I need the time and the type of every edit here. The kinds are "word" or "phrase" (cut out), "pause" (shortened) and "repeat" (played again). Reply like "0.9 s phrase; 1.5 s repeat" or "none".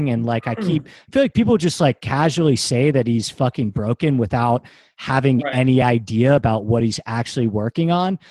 none